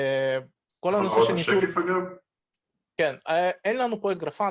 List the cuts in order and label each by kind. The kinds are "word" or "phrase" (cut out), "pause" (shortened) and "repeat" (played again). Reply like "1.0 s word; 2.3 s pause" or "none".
none